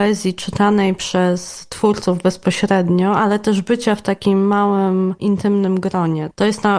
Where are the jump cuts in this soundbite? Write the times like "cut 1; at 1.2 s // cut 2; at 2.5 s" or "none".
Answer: cut 1; at 5.2 s